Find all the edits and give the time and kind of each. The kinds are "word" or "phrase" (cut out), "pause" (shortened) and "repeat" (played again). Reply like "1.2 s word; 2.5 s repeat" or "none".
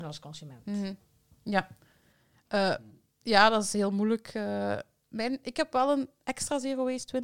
none

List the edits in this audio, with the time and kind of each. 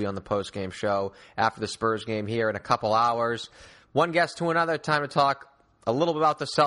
none

